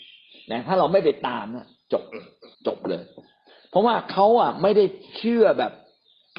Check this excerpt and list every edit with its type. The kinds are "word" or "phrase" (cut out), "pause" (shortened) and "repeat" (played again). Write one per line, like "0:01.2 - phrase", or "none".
0:02.5 - pause